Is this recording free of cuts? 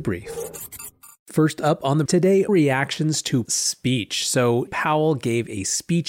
no; 4 cuts; at 2.1 s, 2.5 s, 3.5 s, 4.7 s

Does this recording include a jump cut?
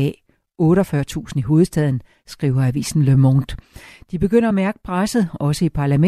no; 0 cuts

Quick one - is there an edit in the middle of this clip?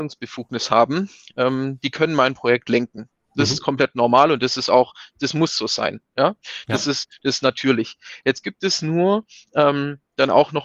no; 0 cuts

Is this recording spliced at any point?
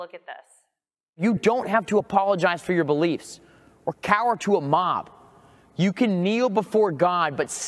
no; 0 cuts

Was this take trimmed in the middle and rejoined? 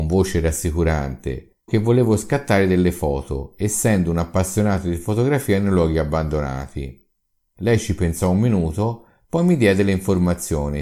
yes; 1 cut; at 1.7 s

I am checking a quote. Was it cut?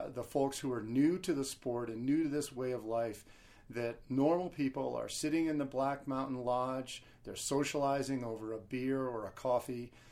no; 0 cuts

